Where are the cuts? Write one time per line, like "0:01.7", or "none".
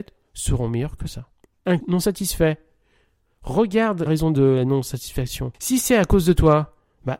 0:01.8
0:04.1